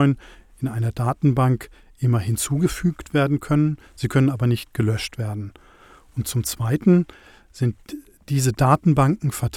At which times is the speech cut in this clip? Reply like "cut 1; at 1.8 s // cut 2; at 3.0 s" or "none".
none